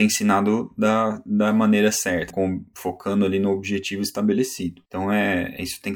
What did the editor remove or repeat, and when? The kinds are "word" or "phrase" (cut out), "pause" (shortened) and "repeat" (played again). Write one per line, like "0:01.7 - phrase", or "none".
0:02.3 - word
0:04.9 - pause